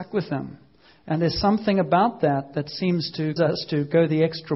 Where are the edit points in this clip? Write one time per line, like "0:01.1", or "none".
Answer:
0:03.4